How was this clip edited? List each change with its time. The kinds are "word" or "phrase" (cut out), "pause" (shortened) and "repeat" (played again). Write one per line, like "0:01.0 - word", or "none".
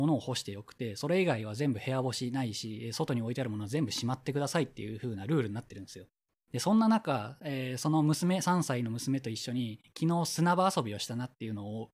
0:06.3 - pause